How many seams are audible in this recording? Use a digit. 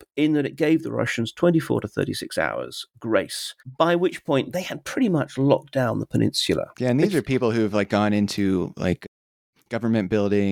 2